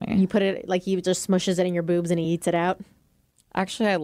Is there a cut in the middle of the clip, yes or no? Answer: no